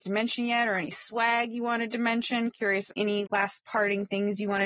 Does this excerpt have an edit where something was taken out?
yes; 2 cuts; at 2.9 s, 3.3 s

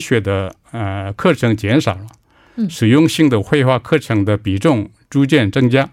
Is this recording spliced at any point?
no; 0 cuts

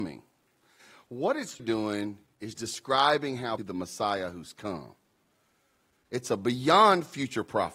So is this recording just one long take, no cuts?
no; 2 cuts; at 1.6 s, 3.6 s

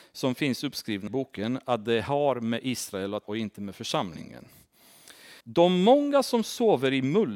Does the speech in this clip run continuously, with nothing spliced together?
no; 3 cuts; at 1.1 s, 3.2 s, 5.4 s

